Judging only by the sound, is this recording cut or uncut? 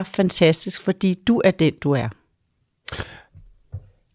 uncut